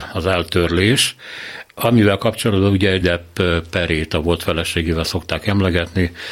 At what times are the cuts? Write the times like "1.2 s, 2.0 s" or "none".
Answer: 3.0 s